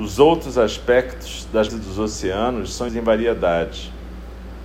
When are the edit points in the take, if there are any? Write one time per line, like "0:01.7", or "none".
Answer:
0:01.7
0:02.9